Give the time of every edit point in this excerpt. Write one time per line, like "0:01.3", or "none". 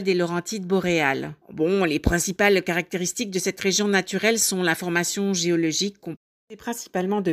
0:01.4